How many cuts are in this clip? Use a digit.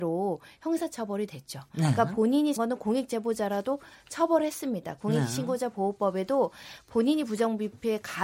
1